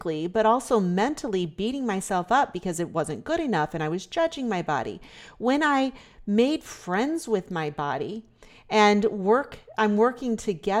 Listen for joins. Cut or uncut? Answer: uncut